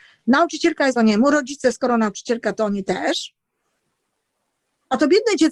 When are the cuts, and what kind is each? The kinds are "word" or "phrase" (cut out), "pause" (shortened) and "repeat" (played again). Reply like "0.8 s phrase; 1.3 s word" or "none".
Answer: 1.0 s word